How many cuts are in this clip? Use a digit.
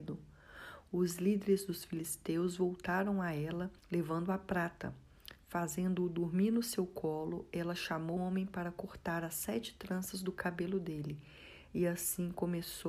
2